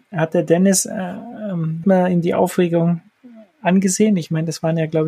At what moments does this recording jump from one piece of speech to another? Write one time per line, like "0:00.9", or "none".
0:01.8